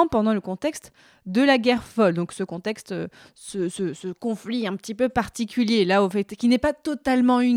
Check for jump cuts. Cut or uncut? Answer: uncut